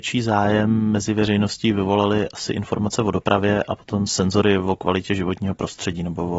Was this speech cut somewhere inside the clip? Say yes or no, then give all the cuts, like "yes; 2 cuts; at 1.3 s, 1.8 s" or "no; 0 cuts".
no; 0 cuts